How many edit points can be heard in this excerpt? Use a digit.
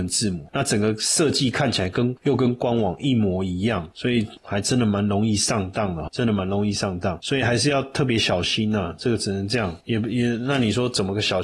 1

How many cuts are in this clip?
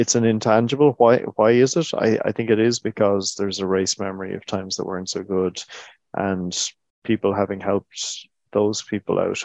0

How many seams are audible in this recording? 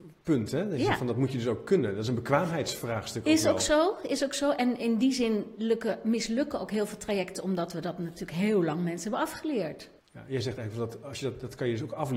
1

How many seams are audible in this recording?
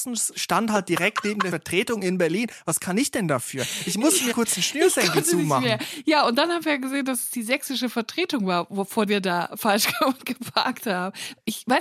3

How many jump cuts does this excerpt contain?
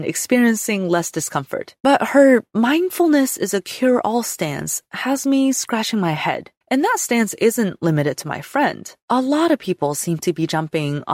3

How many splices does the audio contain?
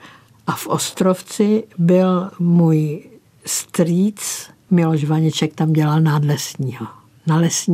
0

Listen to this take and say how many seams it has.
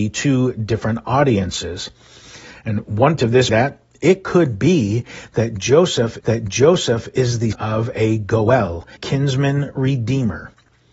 5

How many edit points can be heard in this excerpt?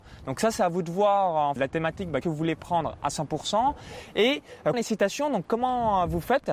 3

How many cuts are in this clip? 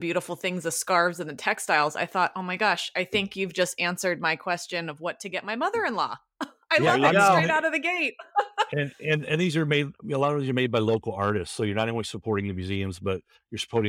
0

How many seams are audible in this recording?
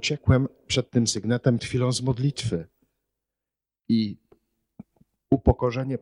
1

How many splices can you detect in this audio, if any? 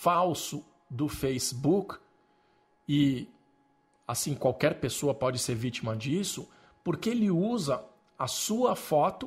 0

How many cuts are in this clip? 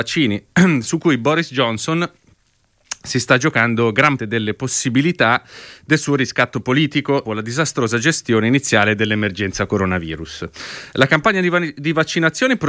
2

